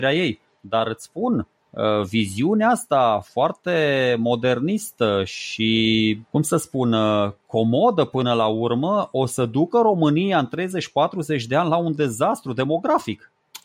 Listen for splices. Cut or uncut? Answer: cut